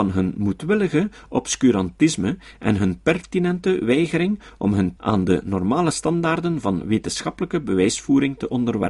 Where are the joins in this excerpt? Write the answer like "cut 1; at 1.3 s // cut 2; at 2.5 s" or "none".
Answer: cut 1; at 5.0 s